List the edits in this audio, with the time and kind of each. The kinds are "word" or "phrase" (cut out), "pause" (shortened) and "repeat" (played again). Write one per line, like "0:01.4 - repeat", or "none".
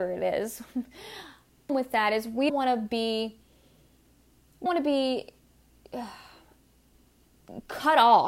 0:01.7 - word
0:02.5 - word
0:04.7 - word